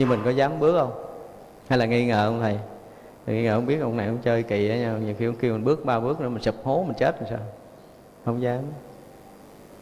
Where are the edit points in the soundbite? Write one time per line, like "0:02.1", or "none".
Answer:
none

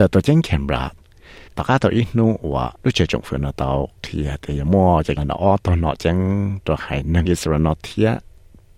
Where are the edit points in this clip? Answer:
0:01.5
0:04.0
0:05.2
0:06.0

